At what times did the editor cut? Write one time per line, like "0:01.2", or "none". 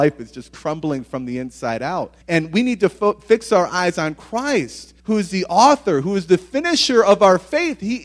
0:02.2
0:05.0